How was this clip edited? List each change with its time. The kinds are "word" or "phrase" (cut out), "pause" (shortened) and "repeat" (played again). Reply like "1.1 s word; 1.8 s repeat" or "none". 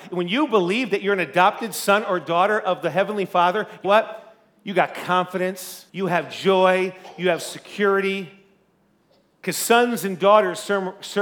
3.8 s word; 5.9 s pause